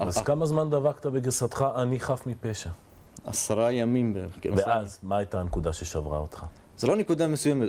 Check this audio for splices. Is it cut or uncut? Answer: uncut